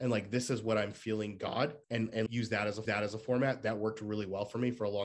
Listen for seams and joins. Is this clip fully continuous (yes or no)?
no